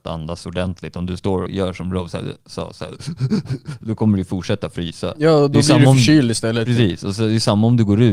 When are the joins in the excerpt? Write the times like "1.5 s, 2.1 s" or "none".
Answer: 1.5 s